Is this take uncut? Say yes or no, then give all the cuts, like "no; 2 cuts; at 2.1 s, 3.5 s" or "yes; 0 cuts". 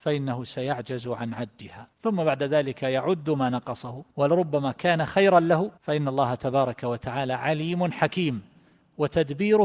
no; 3 cuts; at 1.9 s, 4.1 s, 5.8 s